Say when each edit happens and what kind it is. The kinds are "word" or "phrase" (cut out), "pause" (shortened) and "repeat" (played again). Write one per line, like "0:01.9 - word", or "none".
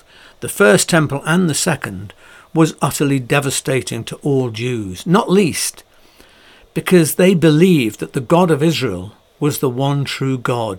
none